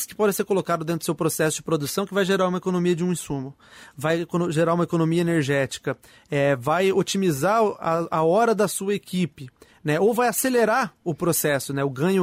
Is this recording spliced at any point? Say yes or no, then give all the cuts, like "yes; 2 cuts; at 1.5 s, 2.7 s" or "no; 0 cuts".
no; 0 cuts